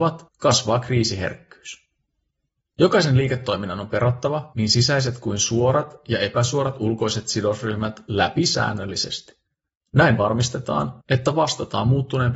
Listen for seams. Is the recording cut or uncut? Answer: uncut